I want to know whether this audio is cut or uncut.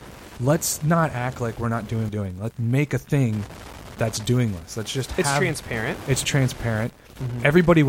cut